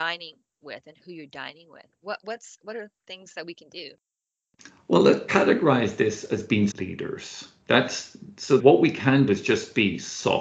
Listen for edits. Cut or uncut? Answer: cut